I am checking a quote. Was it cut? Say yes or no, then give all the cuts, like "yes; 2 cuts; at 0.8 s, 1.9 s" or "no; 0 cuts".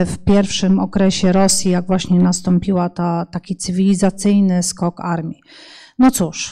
no; 0 cuts